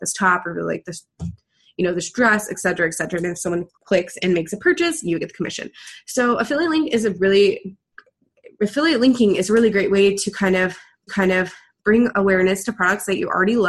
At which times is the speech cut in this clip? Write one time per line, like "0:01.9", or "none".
0:03.7
0:11.1

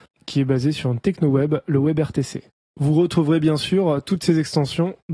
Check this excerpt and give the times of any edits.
none

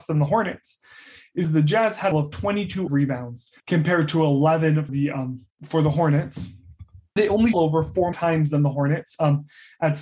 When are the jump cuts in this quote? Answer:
0:01.4
0:02.1
0:02.9
0:03.6
0:04.9
0:05.5
0:07.2
0:07.5
0:08.1

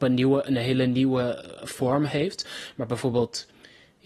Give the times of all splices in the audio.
none

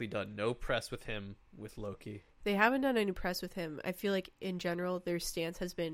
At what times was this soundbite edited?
none

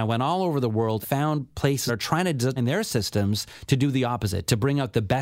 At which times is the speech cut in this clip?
0:01.0
0:01.9
0:02.6

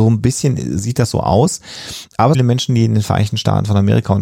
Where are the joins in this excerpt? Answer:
0:02.3

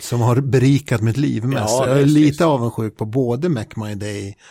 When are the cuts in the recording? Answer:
none

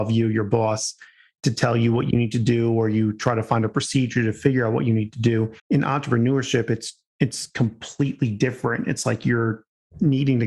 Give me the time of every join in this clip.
0:05.6

